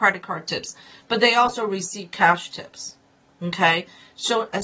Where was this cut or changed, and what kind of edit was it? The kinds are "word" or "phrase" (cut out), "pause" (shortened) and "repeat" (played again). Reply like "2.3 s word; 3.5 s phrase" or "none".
none